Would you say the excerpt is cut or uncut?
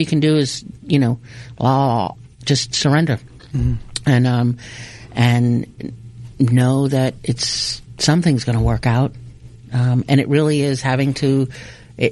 uncut